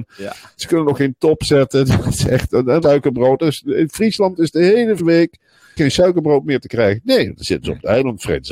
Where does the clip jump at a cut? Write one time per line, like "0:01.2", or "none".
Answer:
0:01.2
0:02.8
0:05.0
0:05.8